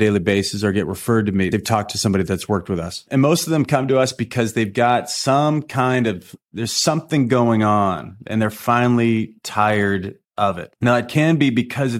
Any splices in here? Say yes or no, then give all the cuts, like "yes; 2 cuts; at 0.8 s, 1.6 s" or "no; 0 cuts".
yes; 1 cut; at 10.2 s